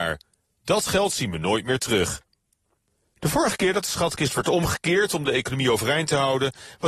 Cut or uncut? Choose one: uncut